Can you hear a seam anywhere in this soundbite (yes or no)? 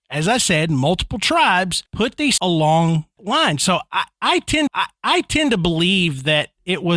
yes